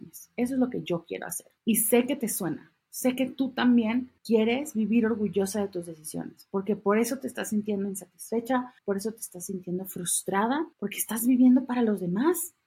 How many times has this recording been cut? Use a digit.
4